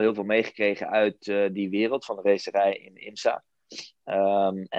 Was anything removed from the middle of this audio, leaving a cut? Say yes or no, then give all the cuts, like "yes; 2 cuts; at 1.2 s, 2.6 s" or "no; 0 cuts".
no; 0 cuts